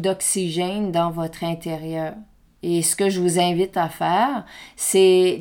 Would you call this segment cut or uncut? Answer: uncut